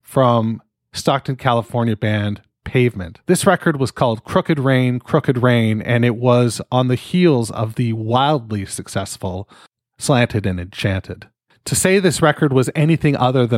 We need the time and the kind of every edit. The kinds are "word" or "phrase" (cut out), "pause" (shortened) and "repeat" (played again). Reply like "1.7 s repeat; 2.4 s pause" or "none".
3.2 s pause; 9.7 s pause

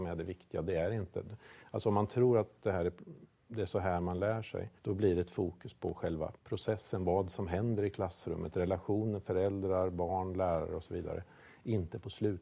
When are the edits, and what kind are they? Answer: 4.8 s pause; 6.4 s pause

